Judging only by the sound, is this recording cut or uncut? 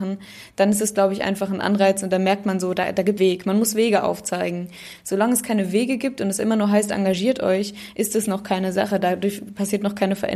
cut